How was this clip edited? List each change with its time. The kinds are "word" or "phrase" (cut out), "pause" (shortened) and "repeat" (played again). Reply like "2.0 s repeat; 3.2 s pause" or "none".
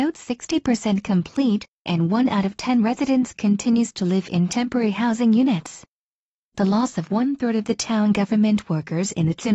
none